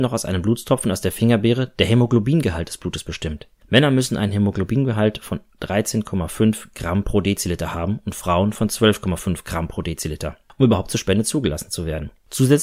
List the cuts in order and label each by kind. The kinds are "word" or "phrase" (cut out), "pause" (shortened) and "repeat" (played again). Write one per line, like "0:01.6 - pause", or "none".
none